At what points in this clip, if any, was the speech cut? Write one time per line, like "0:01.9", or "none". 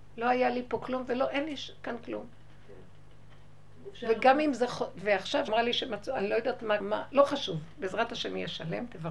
0:05.5
0:06.8